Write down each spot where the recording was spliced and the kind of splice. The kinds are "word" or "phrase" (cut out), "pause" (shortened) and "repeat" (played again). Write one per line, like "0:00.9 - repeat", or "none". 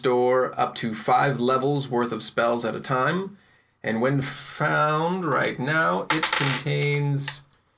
none